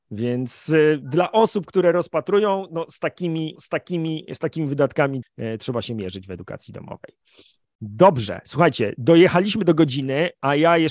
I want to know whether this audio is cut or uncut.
cut